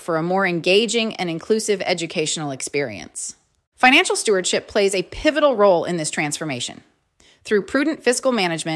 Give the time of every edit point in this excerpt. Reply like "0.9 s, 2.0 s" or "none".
none